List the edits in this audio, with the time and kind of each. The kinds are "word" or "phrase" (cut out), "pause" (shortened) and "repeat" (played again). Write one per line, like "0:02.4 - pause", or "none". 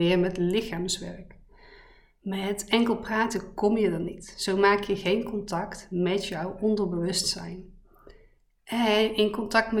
none